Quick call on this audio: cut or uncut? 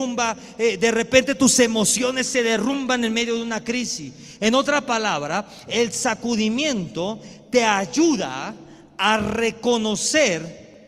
uncut